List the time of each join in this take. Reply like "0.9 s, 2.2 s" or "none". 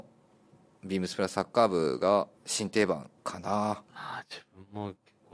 2.3 s, 3.2 s, 3.9 s